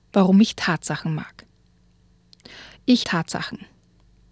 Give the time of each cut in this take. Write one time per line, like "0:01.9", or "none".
0:03.0